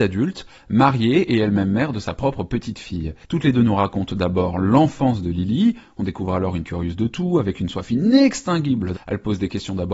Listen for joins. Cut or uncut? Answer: cut